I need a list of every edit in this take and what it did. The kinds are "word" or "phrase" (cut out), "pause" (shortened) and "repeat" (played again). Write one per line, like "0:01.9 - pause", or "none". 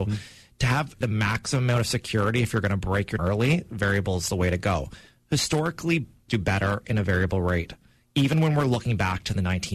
0:01.0 - word
0:03.2 - word
0:06.3 - word

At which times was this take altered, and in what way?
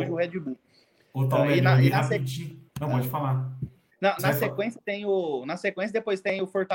0:02.7 - pause
0:04.2 - word

